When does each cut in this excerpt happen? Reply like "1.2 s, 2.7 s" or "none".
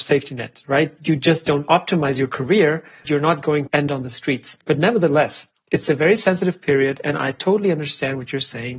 3.0 s, 3.7 s, 4.6 s